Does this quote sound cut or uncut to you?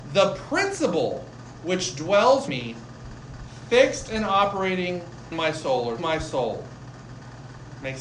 cut